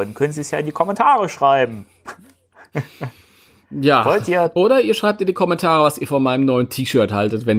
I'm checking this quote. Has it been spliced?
no; 0 cuts

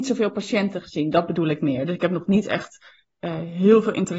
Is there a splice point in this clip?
no; 0 cuts

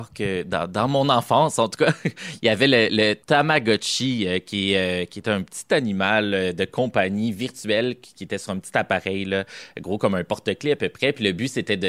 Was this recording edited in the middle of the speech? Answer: yes; 1 cut; at 3.2 s

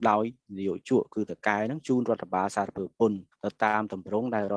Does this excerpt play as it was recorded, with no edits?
no; 1 cut; at 3.3 s

